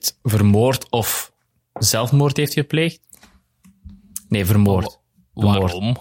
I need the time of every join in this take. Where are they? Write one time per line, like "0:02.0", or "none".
none